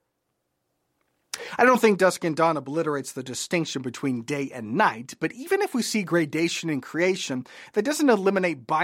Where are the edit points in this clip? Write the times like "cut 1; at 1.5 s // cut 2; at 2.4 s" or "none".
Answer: none

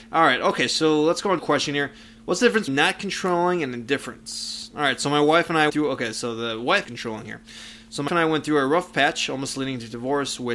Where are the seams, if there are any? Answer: cut 1; at 1.4 s // cut 2; at 2.7 s // cut 3; at 5.7 s // cut 4; at 6.8 s // cut 5; at 8.1 s

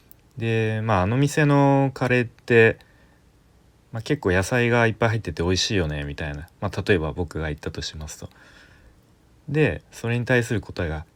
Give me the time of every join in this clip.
none

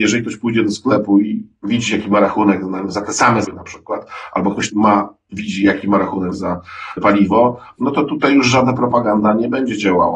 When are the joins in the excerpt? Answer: cut 1; at 3.4 s // cut 2; at 4.7 s // cut 3; at 7.0 s

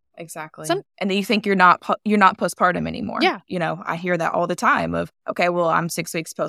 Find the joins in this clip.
cut 1; at 5.2 s

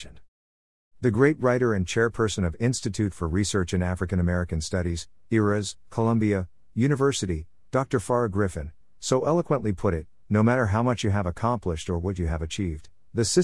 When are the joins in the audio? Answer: none

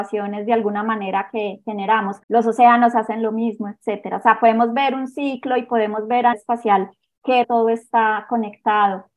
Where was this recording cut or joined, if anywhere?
cut 1; at 2.2 s // cut 2; at 6.3 s // cut 3; at 7.4 s

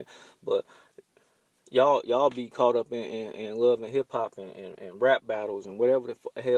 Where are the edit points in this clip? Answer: none

